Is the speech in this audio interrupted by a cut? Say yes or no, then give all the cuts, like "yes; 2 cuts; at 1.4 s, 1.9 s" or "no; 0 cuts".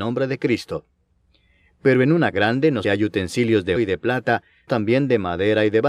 yes; 4 cuts; at 2.3 s, 2.8 s, 3.8 s, 4.7 s